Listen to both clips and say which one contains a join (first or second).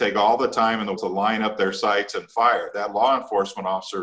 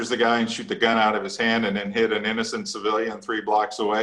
first